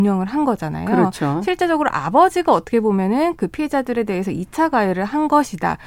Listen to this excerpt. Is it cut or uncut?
uncut